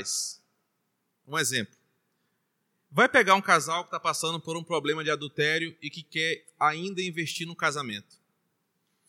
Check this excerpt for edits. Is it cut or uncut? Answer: uncut